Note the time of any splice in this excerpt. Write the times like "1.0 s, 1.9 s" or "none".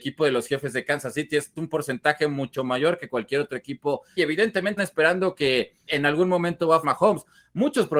1.6 s, 4.2 s, 4.8 s, 5.9 s, 6.8 s